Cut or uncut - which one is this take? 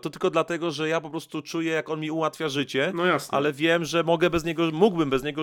uncut